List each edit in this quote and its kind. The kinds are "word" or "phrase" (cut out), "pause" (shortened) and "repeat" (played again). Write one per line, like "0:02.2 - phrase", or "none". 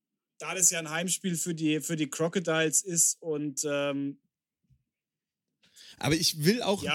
none